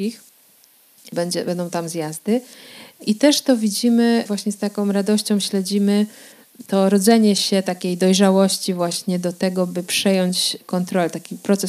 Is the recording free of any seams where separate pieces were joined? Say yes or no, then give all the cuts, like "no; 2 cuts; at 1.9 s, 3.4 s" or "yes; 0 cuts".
yes; 0 cuts